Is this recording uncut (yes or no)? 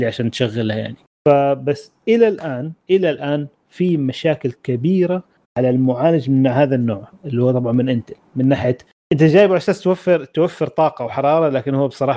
yes